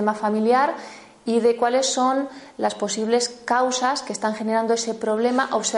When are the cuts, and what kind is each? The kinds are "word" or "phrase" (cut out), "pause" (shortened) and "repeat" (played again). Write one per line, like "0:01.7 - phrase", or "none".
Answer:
none

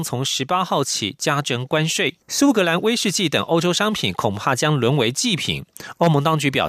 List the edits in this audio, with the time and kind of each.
0:02.2 - pause

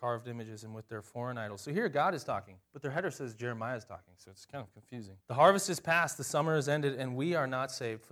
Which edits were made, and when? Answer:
0:02.6 - pause
0:05.2 - pause

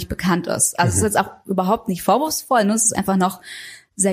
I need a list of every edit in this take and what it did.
none

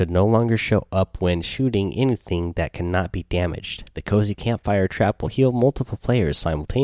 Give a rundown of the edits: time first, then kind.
0:05.3 - word

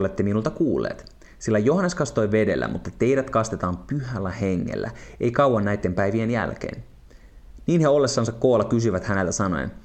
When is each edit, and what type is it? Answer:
none

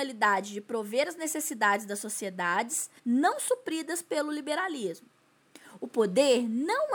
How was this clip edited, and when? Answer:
0:03.0 - pause

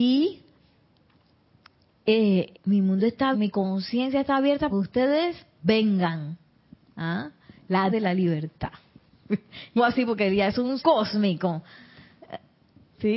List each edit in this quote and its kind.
0:02.5 - word
0:03.3 - word
0:04.7 - word
0:07.9 - word
0:09.8 - word
0:10.8 - word

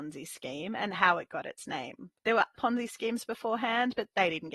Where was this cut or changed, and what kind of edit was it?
0:02.2 - pause
0:02.5 - word

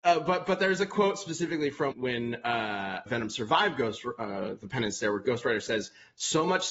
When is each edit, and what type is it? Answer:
0:01.9 - word
0:03.1 - word

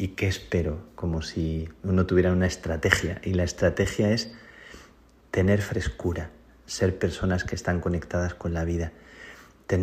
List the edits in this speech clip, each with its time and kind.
none

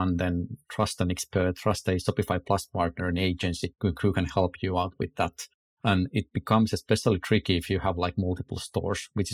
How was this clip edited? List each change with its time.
none

